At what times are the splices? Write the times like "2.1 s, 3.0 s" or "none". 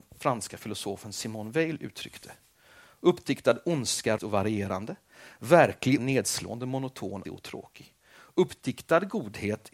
4.2 s, 6.0 s, 7.2 s